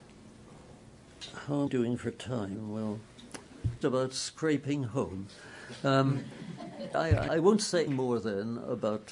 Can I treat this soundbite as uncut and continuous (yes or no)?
no